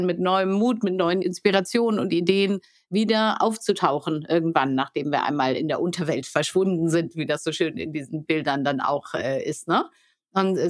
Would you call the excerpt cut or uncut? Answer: uncut